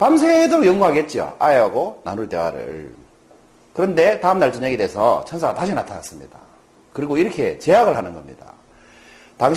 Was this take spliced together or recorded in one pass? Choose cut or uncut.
uncut